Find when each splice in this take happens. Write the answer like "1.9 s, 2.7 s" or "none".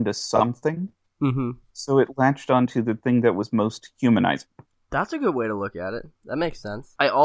none

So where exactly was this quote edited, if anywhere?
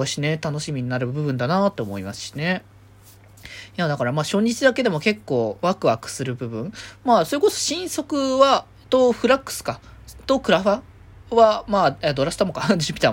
none

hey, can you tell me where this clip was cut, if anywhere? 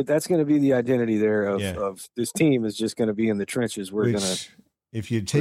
none

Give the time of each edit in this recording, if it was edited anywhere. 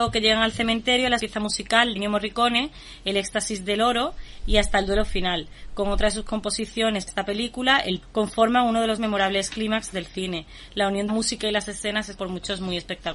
1.2 s, 2.0 s, 7.1 s, 8.0 s, 9.0 s, 9.9 s, 11.1 s, 12.2 s

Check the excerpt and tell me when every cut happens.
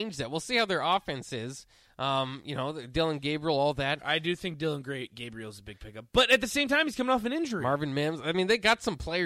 none

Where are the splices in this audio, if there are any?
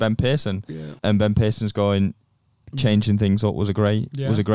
1.0 s

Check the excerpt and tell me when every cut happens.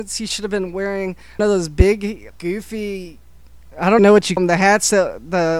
1.4 s, 2.3 s, 4.0 s, 4.4 s

